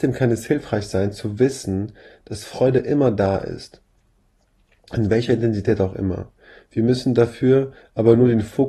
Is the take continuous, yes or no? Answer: yes